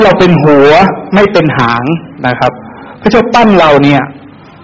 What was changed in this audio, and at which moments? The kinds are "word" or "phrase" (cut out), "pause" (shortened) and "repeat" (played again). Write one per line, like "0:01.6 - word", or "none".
0:02.2 - pause